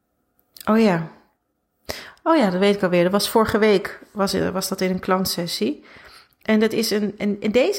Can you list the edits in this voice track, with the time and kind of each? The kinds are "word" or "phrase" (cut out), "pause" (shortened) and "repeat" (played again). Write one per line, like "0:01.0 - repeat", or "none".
none